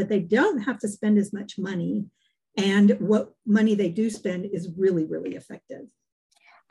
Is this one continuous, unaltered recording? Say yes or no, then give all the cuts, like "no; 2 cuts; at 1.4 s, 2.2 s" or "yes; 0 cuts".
yes; 0 cuts